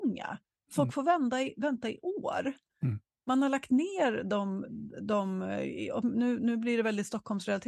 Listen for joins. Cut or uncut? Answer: uncut